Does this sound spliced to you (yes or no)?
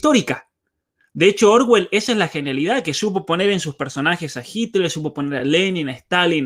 no